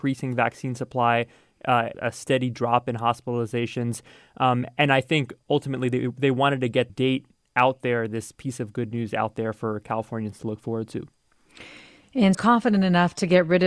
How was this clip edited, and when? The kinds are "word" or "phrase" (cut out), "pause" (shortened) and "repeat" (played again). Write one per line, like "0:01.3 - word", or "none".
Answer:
0:01.9 - word
0:06.9 - word
0:12.3 - word